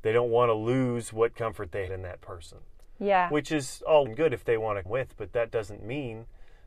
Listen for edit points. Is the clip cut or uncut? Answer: cut